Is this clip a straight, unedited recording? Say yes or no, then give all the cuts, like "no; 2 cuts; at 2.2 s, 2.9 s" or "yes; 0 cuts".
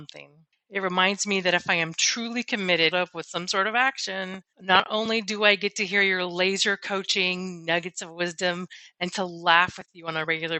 no; 2 cuts; at 2.9 s, 4.5 s